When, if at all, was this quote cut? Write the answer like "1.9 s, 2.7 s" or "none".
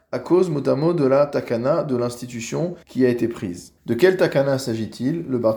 2.8 s, 3.8 s